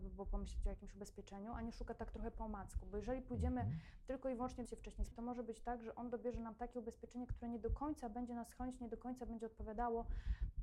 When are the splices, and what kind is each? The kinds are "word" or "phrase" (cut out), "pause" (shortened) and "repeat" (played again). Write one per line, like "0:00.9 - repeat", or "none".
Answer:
0:04.6 - phrase
0:05.1 - word

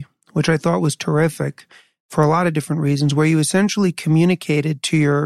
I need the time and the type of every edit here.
none

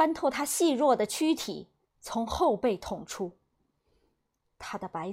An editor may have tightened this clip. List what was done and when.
0:01.8 - pause

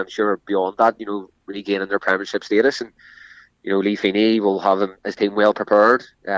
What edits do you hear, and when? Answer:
none

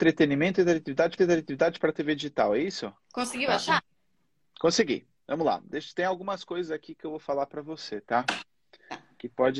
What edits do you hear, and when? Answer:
0:01.2 - repeat

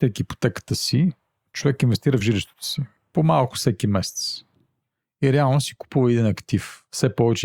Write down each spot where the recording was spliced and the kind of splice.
none

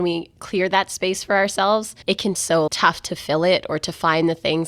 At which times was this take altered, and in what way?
0:02.0 - pause
0:02.4 - word
0:02.7 - word

